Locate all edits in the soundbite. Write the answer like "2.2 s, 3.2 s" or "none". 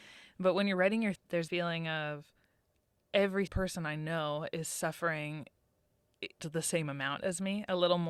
1.2 s, 1.5 s, 3.5 s, 6.4 s